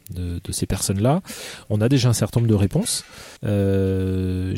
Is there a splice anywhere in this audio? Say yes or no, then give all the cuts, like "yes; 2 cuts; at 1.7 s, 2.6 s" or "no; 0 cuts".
yes; 1 cut; at 3.4 s